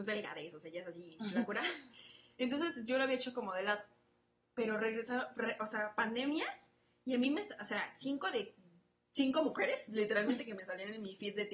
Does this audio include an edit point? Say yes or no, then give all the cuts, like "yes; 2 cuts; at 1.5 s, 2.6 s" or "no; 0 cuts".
no; 0 cuts